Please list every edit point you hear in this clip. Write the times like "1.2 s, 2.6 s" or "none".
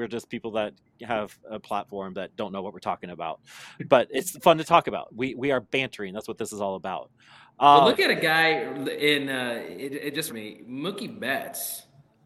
10.3 s